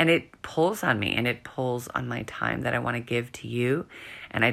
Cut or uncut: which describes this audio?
uncut